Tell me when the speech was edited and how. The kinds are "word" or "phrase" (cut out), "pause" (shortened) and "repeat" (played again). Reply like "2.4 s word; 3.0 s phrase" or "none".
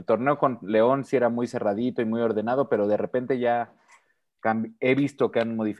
none